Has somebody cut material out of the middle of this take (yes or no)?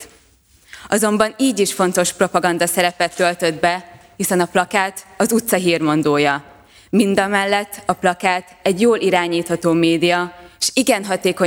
no